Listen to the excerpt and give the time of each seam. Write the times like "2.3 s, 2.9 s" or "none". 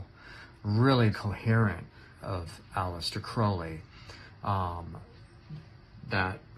1.1 s, 2.1 s

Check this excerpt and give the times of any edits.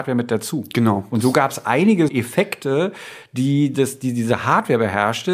2.1 s

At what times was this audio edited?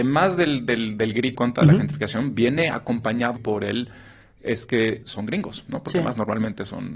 1.3 s, 3.4 s, 5.0 s

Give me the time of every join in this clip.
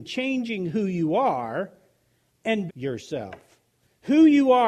2.7 s

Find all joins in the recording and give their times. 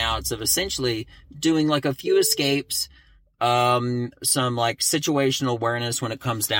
none

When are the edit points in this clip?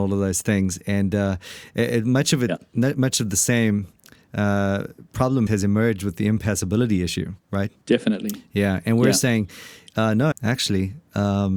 5.5 s, 7.4 s, 10.3 s

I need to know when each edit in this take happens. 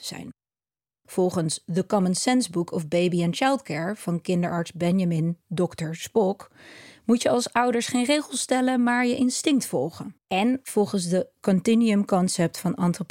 10.2 s

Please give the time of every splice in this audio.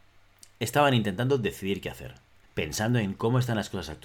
2.4 s

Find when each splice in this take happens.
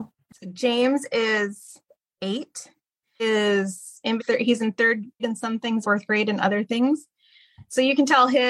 3.2 s, 4.2 s, 5.2 s, 5.8 s

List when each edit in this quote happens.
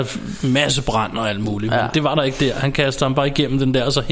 none

